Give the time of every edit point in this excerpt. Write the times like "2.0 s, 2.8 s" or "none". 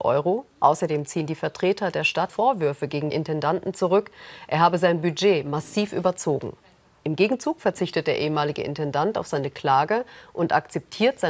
2.3 s, 3.1 s